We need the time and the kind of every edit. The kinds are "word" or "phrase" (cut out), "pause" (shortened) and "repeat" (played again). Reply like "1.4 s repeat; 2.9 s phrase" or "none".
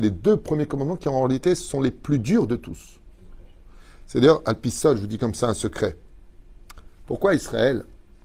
none